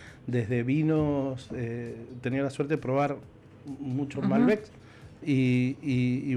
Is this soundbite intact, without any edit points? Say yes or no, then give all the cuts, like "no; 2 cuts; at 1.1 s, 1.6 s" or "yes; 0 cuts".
yes; 0 cuts